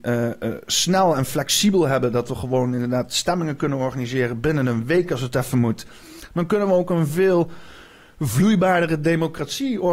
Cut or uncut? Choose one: uncut